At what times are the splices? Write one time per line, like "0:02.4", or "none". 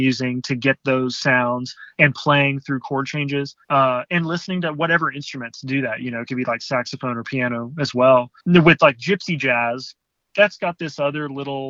0:03.6
0:08.4